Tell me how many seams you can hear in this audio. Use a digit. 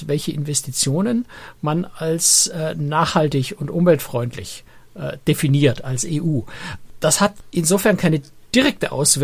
0